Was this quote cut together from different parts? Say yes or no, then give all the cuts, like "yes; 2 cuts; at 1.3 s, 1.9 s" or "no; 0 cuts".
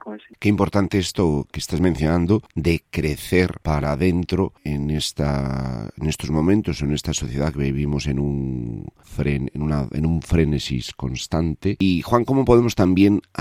no; 0 cuts